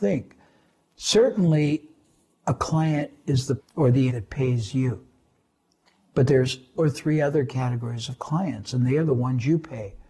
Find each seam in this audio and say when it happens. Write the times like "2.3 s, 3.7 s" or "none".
3.6 s, 4.1 s, 6.7 s